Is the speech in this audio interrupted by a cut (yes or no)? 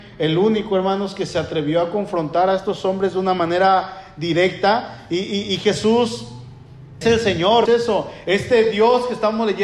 yes